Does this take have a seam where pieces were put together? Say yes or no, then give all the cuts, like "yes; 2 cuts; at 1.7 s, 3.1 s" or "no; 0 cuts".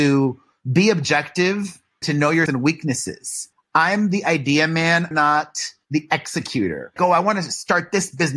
yes; 5 cuts; at 2.0 s, 2.5 s, 3.5 s, 5.1 s, 7.0 s